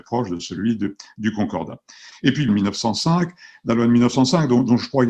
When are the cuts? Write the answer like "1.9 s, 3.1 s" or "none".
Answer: 2.5 s